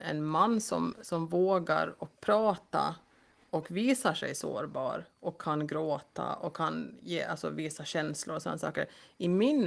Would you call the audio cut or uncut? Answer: cut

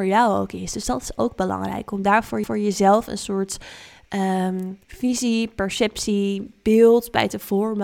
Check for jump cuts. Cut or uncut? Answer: cut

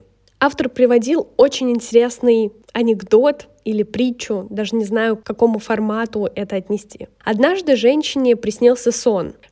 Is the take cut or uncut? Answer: uncut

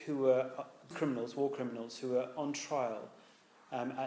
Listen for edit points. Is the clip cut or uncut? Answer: cut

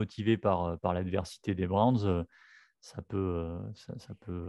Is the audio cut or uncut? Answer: uncut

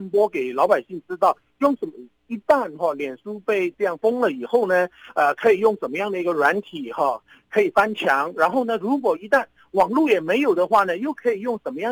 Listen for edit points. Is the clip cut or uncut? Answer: uncut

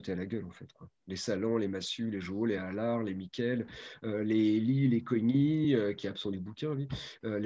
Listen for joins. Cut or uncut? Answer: uncut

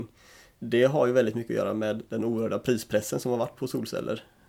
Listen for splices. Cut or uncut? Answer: uncut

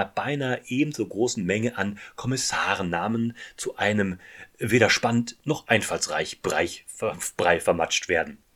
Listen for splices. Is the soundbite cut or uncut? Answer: uncut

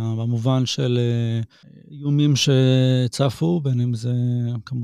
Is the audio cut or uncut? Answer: uncut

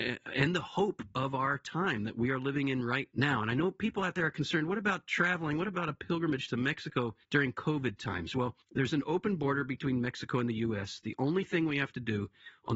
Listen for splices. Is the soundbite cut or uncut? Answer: cut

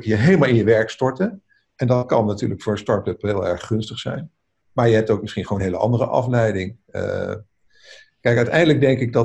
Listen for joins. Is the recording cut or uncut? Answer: uncut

